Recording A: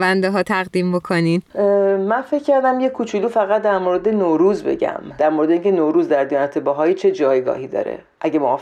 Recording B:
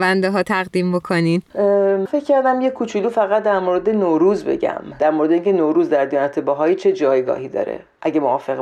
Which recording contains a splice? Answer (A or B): B